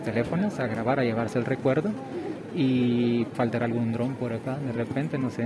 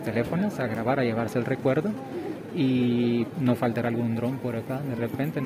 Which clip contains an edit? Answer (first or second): first